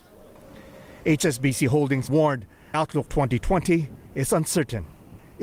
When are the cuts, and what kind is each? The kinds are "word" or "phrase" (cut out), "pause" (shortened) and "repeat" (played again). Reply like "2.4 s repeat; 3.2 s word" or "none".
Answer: 2.1 s word; 2.7 s word; 3.1 s word